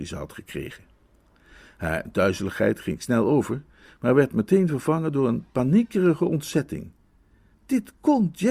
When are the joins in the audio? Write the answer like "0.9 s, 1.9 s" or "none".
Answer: none